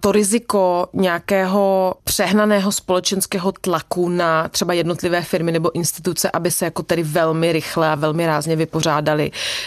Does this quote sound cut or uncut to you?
uncut